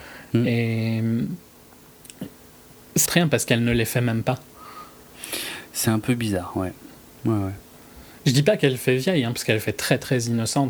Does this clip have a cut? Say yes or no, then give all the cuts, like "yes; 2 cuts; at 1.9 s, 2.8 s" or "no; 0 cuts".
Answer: yes; 1 cut; at 3.1 s